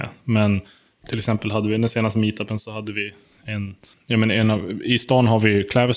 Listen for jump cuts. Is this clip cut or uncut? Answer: uncut